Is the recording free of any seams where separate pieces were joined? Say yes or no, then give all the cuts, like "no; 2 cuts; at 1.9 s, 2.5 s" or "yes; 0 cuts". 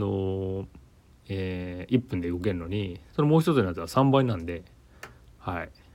no; 1 cut; at 3.1 s